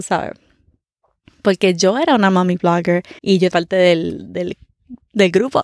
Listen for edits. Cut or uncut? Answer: cut